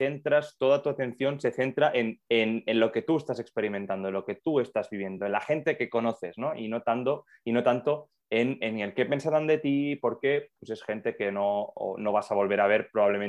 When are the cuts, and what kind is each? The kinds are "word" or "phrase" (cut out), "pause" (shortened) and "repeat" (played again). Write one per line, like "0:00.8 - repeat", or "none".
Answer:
none